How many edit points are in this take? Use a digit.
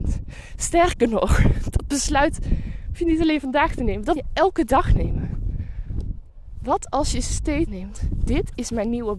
2